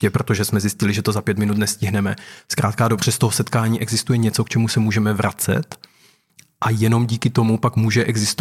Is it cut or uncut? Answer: uncut